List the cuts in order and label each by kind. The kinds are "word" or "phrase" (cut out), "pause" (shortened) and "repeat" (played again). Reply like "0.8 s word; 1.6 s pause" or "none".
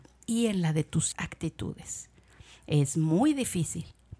1.1 s phrase